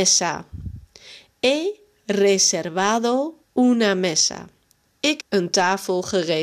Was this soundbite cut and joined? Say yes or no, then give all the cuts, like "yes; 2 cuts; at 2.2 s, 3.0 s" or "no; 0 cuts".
yes; 2 cuts; at 3.4 s, 5.2 s